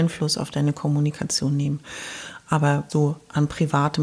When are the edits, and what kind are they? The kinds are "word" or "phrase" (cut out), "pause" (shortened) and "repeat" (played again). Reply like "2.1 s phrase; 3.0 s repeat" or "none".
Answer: 2.9 s word